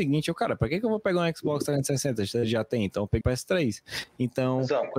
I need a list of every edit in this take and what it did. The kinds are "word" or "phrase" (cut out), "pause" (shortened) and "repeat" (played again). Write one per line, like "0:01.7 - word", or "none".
0:03.2 - word